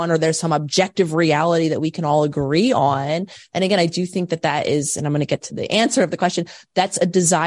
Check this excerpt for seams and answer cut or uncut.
uncut